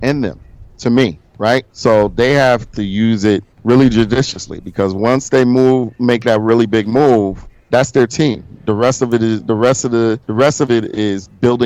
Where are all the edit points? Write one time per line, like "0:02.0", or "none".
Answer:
0:01.7
0:10.2